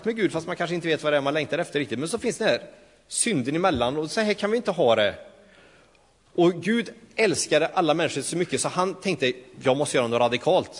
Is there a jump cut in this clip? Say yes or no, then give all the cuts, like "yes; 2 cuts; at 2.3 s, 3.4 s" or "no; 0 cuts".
no; 0 cuts